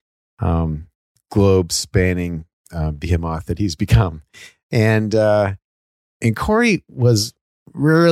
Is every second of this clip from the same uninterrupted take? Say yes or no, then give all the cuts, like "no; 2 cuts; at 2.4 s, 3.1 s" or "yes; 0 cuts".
yes; 0 cuts